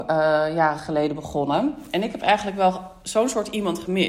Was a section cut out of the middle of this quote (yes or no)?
no